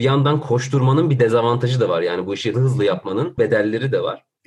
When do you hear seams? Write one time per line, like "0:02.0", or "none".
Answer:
0:02.5
0:03.4